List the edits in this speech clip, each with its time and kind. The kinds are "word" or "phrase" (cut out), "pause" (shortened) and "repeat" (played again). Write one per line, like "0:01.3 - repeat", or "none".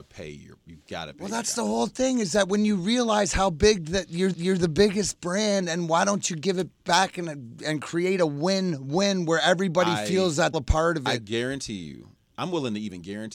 0:04.3 - repeat
0:10.5 - phrase